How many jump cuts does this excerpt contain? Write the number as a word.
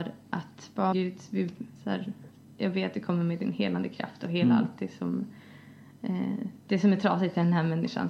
three